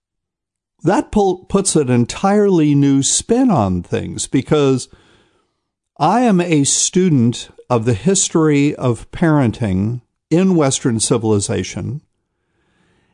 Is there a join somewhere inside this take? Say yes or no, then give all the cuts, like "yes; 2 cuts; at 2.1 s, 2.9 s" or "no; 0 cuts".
no; 0 cuts